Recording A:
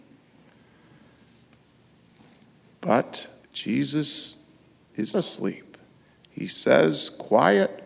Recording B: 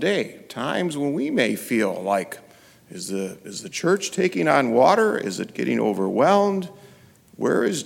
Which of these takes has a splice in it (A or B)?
A